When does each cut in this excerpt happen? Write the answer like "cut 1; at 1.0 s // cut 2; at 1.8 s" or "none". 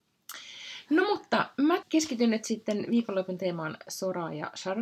cut 1; at 1.8 s